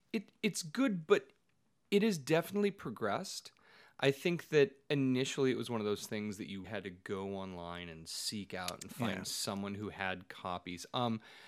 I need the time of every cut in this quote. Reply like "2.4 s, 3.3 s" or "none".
6.6 s